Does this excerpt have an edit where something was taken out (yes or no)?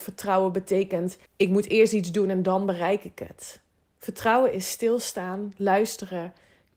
yes